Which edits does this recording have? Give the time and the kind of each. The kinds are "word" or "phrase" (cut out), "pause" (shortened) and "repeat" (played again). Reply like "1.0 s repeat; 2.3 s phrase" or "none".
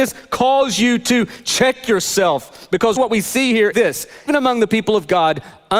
3.0 s word; 3.7 s word; 4.3 s word